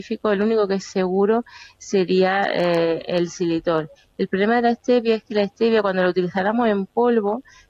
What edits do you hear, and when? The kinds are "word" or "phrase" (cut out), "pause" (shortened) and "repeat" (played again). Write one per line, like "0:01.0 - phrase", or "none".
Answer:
none